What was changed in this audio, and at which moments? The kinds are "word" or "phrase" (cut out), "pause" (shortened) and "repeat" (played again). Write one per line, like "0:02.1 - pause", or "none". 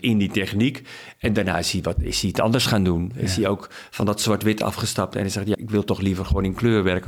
0:05.5 - word